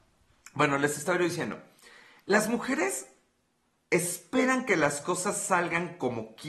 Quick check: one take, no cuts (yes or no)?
yes